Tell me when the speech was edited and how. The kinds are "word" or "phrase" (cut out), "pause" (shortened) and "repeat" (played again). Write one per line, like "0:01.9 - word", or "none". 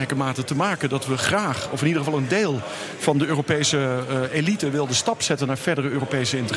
none